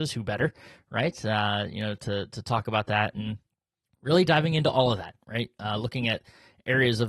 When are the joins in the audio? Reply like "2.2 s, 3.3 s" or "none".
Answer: none